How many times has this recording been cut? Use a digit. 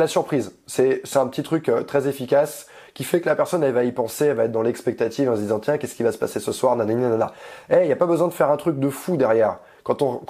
0